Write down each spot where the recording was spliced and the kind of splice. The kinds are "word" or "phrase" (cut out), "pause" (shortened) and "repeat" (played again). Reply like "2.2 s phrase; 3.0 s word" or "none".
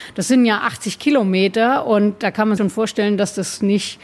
2.6 s word